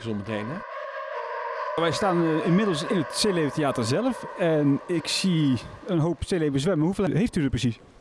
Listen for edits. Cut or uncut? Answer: uncut